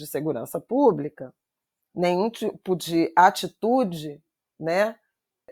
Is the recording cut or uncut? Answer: uncut